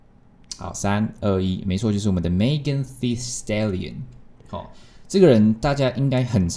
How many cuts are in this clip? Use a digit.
0